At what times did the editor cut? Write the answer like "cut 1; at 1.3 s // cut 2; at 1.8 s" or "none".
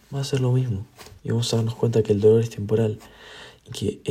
cut 1; at 1.2 s